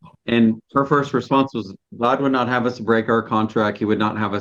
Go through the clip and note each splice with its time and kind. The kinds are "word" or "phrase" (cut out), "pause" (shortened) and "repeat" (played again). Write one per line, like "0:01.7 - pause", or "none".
none